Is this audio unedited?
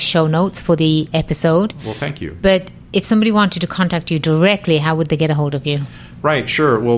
yes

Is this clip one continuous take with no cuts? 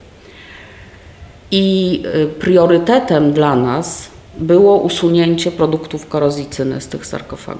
yes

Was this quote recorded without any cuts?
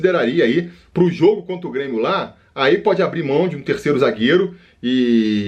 yes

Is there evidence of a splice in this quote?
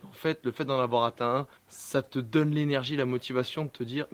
yes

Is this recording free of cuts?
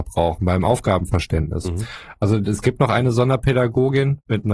yes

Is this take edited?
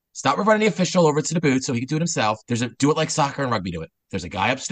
yes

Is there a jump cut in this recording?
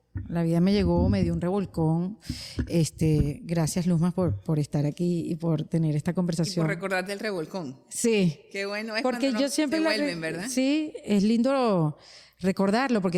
no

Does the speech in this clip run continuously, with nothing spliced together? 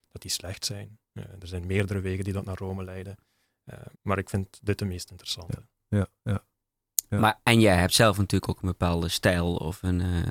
no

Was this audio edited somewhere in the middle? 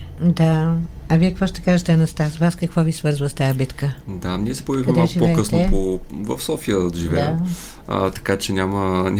no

